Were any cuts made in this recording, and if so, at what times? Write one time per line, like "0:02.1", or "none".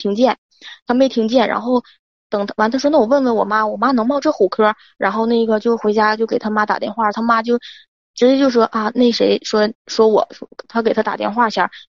0:09.8